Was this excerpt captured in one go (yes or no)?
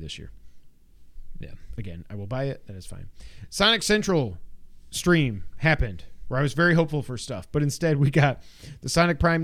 yes